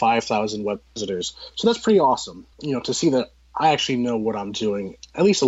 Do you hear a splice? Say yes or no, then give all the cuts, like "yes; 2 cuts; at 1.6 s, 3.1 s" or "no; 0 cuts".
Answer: yes; 1 cut; at 2.5 s